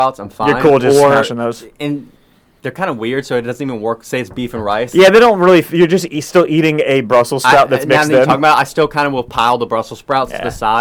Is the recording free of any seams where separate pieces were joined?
yes; 0 cuts

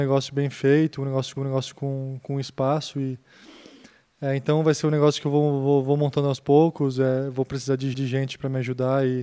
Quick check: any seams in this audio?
yes; 2 cuts; at 1.4 s, 7.9 s

